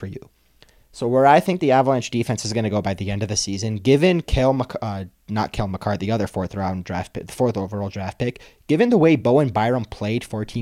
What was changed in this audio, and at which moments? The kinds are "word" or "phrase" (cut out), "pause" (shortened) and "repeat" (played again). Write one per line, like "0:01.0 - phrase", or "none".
none